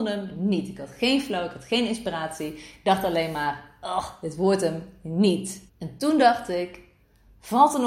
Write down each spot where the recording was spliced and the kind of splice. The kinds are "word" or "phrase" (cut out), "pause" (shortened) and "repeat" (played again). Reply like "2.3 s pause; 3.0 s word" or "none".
5.7 s pause

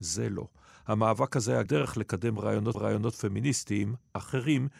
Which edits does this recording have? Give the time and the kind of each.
1.7 s word; 2.7 s repeat

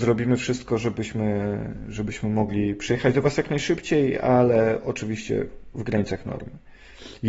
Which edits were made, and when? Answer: none

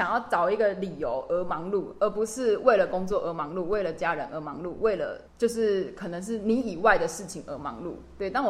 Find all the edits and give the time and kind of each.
5.3 s pause

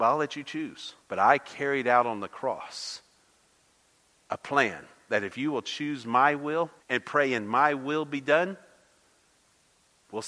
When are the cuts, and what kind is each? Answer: 1.0 s pause; 6.8 s pause

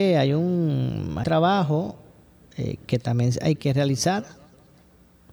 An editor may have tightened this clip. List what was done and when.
1.2 s word; 3.6 s word

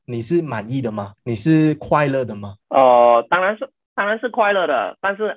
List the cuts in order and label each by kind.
1.2 s pause; 2.6 s pause

